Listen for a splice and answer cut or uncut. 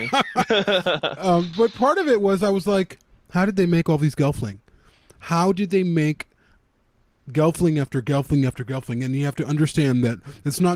uncut